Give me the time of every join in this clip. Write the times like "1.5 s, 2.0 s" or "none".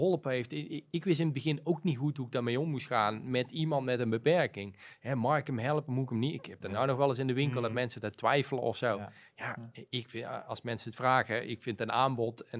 none